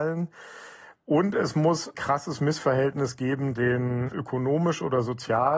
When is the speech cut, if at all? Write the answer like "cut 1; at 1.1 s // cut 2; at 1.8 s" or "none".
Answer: cut 1; at 1.9 s // cut 2; at 3.6 s // cut 3; at 4.1 s